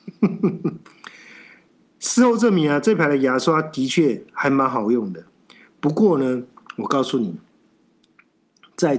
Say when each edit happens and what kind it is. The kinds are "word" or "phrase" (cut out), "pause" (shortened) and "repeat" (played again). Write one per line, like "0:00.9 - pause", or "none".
none

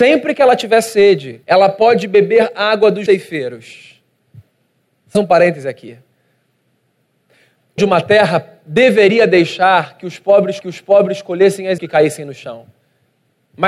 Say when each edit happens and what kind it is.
0:01.4 - pause
0:03.1 - word
0:05.1 - word
0:07.8 - word
0:10.6 - repeat
0:11.8 - word

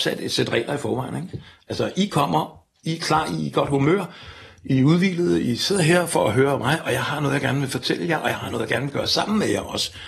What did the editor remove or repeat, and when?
none

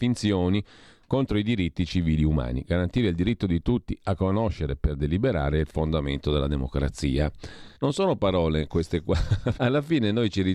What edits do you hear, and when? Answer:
0:07.8 - pause
0:09.6 - word

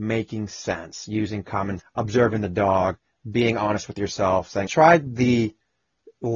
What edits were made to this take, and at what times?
0:01.8 - word
0:04.7 - phrase

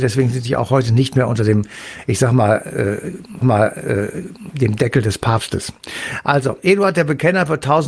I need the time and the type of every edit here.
0:03.4 - repeat

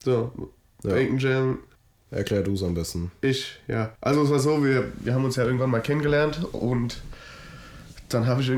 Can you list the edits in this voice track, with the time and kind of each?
0:01.8 - pause
0:04.0 - pause

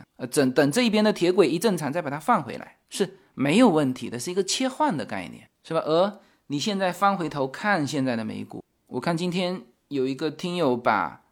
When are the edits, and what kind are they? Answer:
0:05.5 - pause

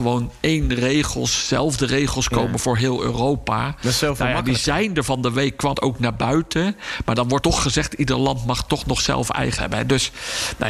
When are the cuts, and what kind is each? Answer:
0:05.7 - word
0:07.4 - word
0:09.6 - word

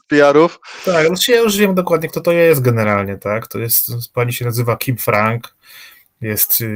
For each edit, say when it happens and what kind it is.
none

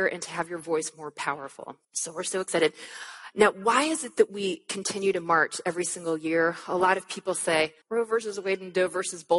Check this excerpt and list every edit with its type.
0:01.8 - pause
0:07.8 - pause

